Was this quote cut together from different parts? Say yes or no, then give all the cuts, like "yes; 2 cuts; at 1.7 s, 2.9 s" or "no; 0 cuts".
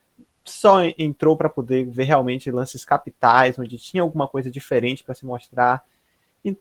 no; 0 cuts